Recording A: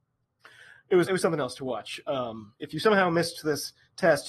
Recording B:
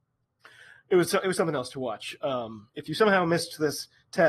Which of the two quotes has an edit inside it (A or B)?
A